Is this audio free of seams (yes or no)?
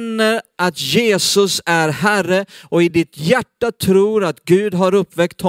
yes